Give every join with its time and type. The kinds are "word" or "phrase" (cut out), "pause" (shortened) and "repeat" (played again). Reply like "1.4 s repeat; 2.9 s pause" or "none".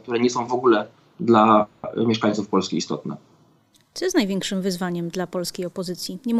none